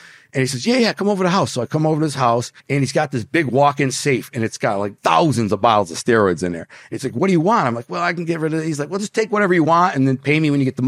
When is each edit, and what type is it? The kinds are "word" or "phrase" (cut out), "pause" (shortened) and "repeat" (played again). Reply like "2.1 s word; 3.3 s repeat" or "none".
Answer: 2.6 s pause; 5.0 s pause